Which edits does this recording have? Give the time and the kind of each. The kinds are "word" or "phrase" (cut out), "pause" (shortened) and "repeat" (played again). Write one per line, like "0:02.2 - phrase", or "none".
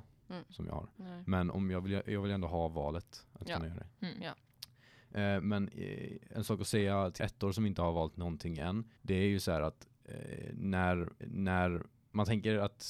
0:00.9 - pause
0:07.2 - word
0:09.0 - pause
0:11.2 - repeat